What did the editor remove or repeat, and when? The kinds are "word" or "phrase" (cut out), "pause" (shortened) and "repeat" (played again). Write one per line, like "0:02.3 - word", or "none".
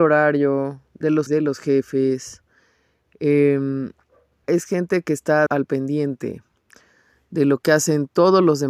0:01.3 - word
0:04.4 - word
0:05.5 - word